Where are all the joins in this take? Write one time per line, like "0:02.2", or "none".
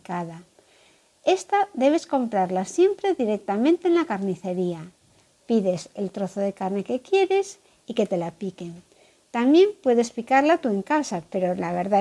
none

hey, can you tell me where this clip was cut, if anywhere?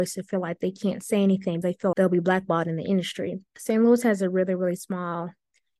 0:01.6
0:01.9
0:03.5

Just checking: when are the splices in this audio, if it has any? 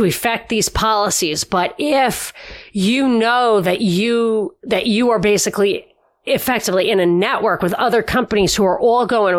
none

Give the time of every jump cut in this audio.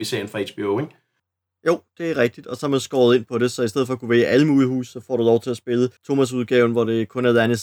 0:06.0

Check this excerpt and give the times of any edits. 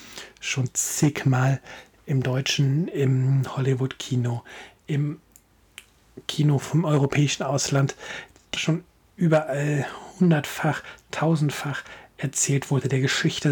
0:08.6

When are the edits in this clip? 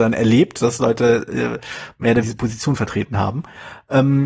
0:02.2

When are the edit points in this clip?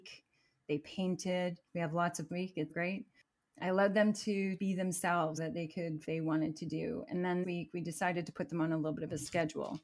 0:01.7
0:02.3
0:02.7
0:04.6
0:05.4
0:06.0
0:07.4

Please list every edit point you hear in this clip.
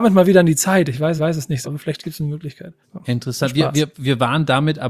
0:01.2
0:01.6
0:02.8

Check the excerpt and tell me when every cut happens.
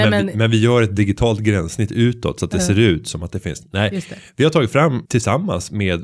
0:05.1

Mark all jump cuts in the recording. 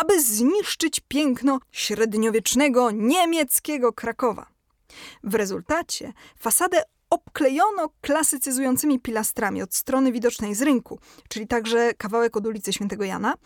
0:01.6

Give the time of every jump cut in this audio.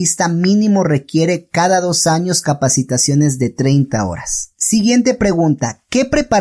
0:04.5

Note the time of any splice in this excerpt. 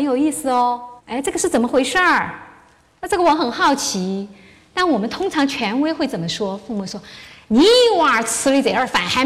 0:01.0

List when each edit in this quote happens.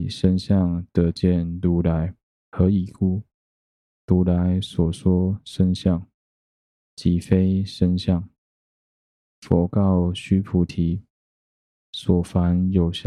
0:02.2

